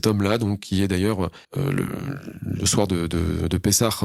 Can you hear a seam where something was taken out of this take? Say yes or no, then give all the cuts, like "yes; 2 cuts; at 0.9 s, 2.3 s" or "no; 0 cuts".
yes; 1 cut; at 1.4 s